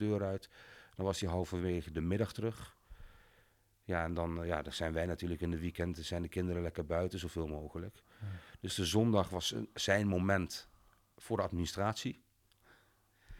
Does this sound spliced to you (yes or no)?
yes